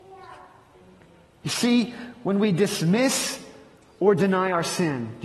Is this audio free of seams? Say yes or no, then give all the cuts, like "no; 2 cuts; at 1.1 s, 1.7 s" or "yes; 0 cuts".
yes; 0 cuts